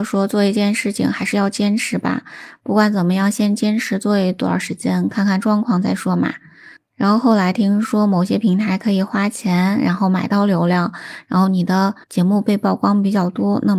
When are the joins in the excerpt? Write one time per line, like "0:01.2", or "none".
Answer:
0:06.8
0:12.0